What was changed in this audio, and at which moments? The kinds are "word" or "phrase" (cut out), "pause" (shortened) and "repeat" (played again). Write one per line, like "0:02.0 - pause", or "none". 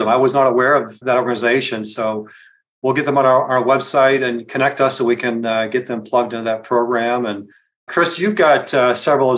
none